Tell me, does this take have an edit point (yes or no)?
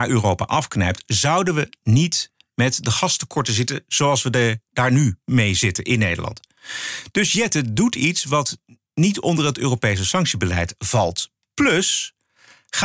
no